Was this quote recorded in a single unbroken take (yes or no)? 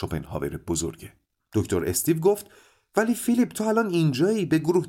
yes